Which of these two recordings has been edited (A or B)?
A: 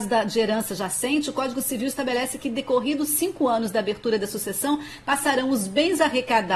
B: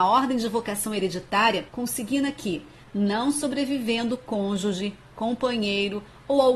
B